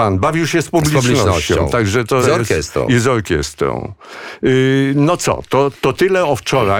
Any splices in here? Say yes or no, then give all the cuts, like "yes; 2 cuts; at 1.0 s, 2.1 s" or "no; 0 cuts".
yes; 2 cuts; at 2.2 s, 5.7 s